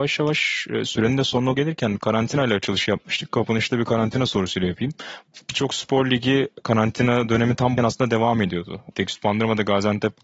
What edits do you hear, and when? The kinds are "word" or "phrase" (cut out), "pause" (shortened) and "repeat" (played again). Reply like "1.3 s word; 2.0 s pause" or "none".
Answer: 1.5 s word; 7.8 s word